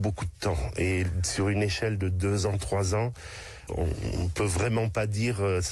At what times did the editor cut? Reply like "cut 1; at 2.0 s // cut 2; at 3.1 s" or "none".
none